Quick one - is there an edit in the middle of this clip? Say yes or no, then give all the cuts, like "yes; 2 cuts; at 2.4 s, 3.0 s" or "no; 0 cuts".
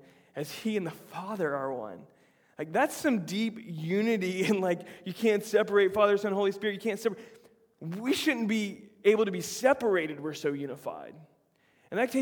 no; 0 cuts